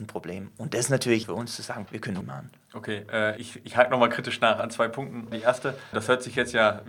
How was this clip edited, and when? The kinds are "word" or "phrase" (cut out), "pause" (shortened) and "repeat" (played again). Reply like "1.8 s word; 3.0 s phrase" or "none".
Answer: 1.2 s word; 1.8 s word; 2.2 s word; 3.4 s word; 5.3 s word; 5.9 s word

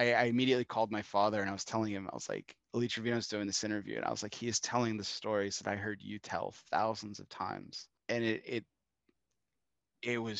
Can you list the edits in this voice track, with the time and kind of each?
2.6 s pause; 8.0 s pause

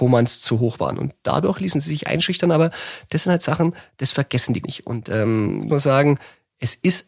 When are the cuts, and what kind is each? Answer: 4.6 s word; 5.7 s phrase

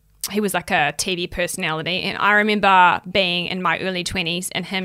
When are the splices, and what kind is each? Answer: none

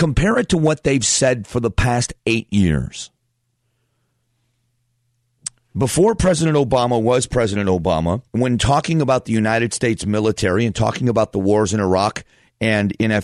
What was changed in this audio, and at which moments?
8.3 s pause

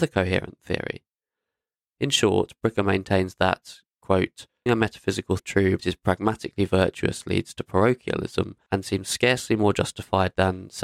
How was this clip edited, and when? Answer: 4.7 s word; 5.4 s word; 5.8 s word

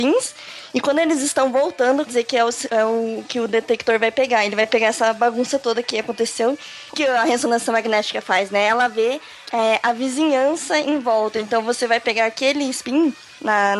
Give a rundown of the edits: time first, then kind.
2.1 s word; 6.9 s word

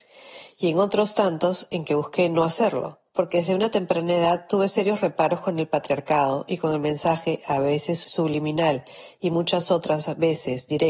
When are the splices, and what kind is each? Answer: 3.1 s pause

